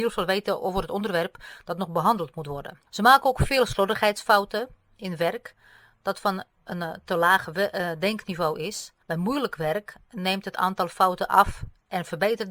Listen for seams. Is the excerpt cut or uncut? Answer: cut